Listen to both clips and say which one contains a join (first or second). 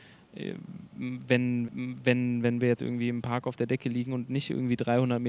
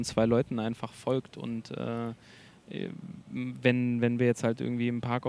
first